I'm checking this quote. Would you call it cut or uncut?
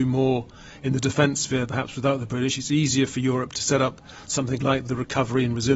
uncut